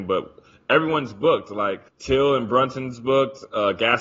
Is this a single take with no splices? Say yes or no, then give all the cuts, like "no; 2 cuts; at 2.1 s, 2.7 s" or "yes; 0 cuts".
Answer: no; 1 cut; at 1.9 s